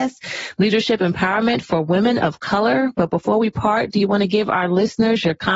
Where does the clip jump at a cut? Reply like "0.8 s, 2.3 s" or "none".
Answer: none